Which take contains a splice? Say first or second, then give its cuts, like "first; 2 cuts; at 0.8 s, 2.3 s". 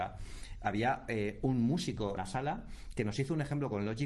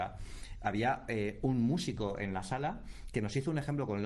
first; 1 cut; at 2.2 s